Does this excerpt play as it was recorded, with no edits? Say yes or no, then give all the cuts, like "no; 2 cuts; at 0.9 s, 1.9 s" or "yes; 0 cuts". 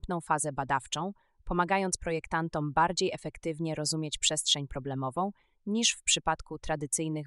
yes; 0 cuts